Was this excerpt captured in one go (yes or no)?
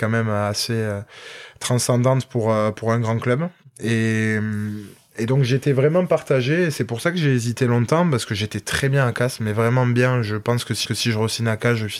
no